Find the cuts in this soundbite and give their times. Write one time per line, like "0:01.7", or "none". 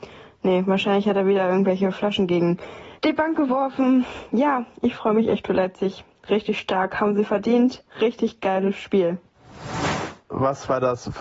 0:03.0
0:07.9